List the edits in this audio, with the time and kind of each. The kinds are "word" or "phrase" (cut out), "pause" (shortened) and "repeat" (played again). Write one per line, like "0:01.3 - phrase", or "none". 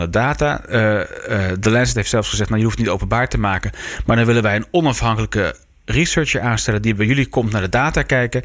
none